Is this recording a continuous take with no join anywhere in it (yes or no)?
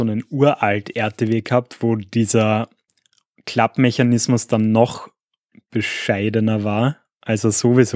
yes